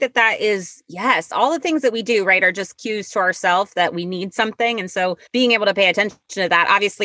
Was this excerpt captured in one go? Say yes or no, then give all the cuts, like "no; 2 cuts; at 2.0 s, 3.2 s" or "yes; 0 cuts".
no; 1 cut; at 5.3 s